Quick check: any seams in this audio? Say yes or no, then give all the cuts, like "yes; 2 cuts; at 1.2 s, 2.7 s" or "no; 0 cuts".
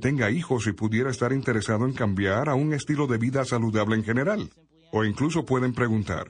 no; 0 cuts